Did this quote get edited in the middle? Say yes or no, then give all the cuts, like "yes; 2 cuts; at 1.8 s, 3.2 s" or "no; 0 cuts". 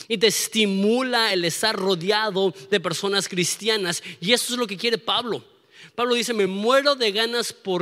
no; 0 cuts